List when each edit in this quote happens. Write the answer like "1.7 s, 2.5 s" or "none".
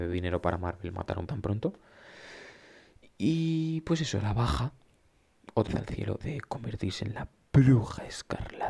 1.3 s, 5.7 s, 6.2 s